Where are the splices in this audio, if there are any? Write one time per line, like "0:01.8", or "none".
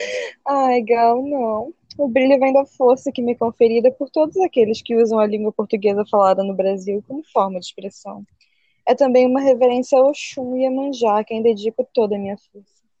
none